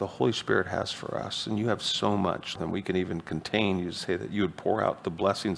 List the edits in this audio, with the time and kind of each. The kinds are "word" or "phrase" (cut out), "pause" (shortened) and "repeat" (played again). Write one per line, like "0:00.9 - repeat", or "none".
0:02.6 - phrase